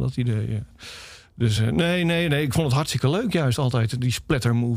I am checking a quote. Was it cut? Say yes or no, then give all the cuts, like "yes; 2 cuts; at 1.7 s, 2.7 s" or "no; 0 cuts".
no; 0 cuts